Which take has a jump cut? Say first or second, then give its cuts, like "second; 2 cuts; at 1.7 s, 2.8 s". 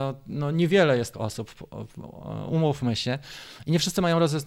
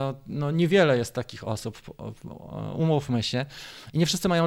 first; 1 cut; at 1.1 s